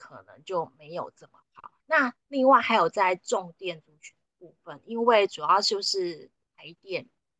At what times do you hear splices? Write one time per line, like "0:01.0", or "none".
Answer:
0:01.8

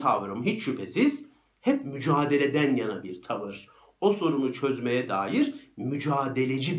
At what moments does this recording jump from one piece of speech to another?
none

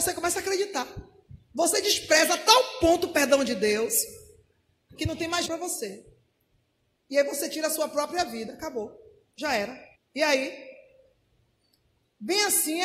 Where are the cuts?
0:01.4
0:05.5
0:10.0

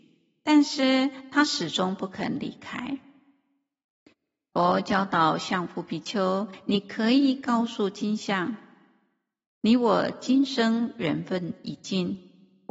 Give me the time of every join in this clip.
none

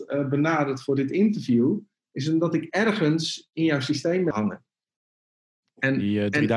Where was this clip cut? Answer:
0:04.3

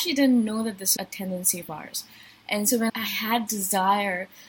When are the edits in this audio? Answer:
0:01.0
0:02.9
0:03.5

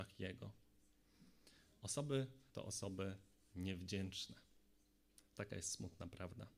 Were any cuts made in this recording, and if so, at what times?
0:02.5

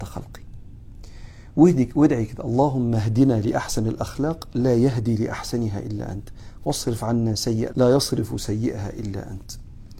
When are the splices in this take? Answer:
0:07.7

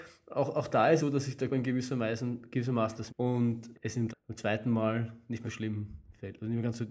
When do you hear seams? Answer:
0:01.0
0:01.5
0:03.1
0:03.7
0:04.1
0:05.4

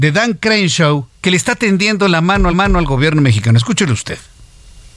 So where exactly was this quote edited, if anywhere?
0:01.1
0:02.5

